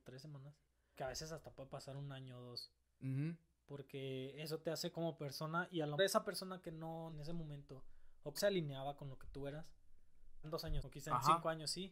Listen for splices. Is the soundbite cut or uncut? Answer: cut